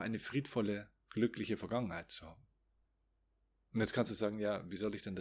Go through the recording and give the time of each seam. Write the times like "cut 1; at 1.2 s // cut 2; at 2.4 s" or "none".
cut 1; at 1.0 s